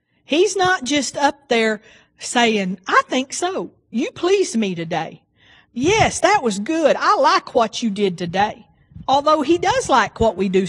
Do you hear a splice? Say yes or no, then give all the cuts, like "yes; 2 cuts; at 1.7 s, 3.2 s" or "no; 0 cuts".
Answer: no; 0 cuts